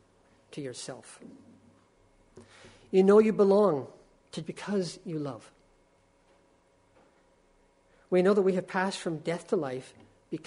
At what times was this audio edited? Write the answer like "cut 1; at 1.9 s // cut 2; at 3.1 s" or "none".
cut 1; at 4.4 s